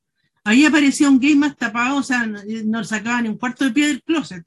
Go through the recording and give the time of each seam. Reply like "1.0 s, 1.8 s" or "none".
none